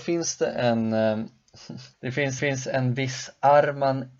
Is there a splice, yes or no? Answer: yes